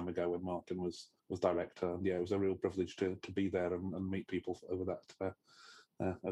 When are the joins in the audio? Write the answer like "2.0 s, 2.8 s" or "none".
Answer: 1.2 s